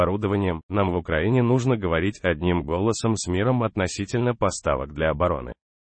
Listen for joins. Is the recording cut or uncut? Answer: uncut